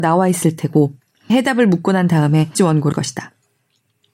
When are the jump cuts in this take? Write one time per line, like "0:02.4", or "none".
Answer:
0:01.3
0:02.5
0:02.9